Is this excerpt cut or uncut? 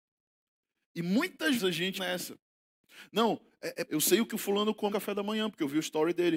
cut